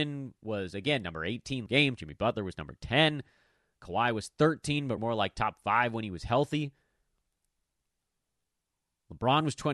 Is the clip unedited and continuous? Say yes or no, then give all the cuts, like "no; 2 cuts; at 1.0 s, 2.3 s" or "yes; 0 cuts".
no; 2 cuts; at 1.7 s, 5.0 s